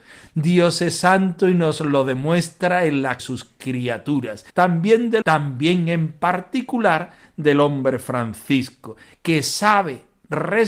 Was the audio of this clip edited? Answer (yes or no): yes